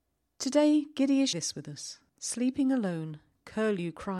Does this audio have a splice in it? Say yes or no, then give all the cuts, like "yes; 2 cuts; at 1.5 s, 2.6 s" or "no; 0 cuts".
yes; 2 cuts; at 1.3 s, 2.1 s